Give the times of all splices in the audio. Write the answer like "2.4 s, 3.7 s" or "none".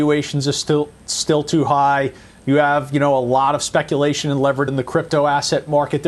4.7 s